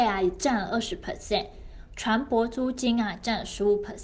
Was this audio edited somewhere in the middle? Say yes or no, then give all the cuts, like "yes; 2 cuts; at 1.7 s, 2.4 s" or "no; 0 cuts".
no; 0 cuts